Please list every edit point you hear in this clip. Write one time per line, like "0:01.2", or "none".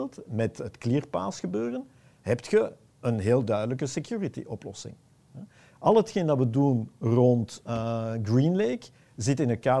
none